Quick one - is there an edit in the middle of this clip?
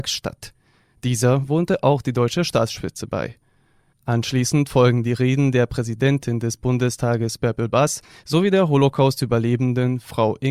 no; 0 cuts

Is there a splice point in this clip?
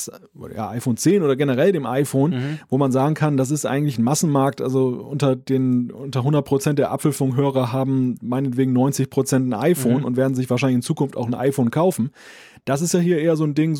no; 0 cuts

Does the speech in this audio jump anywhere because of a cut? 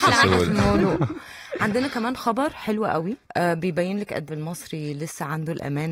yes; 2 cuts; at 3.2 s, 4.3 s

